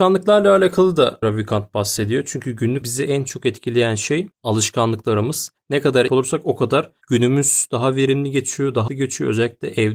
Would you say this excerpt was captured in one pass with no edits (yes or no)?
no